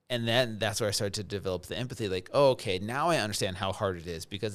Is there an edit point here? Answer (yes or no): no